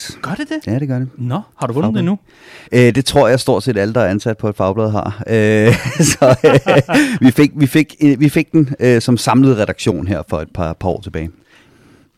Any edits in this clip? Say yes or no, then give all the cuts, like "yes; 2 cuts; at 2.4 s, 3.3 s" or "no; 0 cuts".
yes; 2 cuts; at 1.5 s, 2.7 s